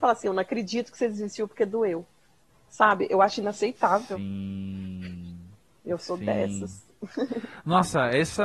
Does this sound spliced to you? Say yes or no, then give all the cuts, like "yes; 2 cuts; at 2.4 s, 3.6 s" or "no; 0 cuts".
no; 0 cuts